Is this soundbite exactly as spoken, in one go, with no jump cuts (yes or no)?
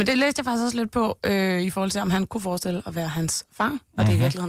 yes